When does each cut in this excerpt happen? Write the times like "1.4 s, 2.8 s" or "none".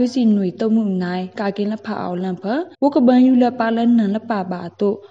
2.7 s